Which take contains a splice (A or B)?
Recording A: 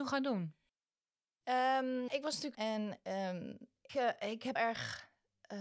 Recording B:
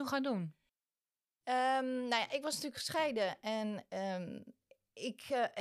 A